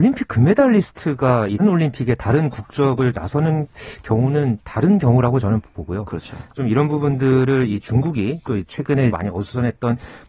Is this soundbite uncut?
no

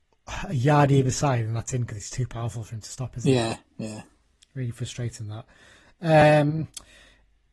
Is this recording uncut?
yes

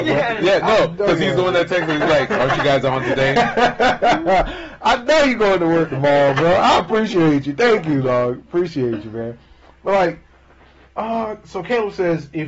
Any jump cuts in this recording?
no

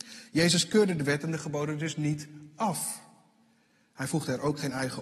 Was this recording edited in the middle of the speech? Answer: no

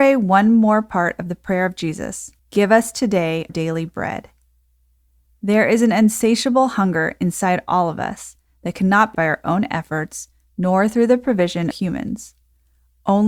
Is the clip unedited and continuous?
no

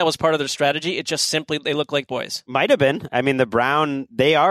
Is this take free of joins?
no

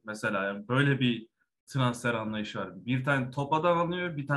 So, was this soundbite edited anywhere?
no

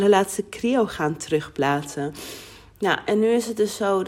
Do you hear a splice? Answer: no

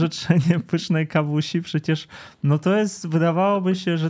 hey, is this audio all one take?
yes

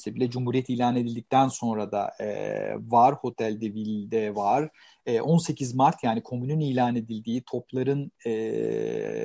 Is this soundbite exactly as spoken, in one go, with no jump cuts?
yes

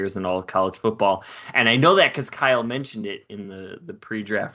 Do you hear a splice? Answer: no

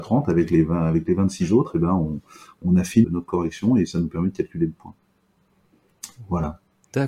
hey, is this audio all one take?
no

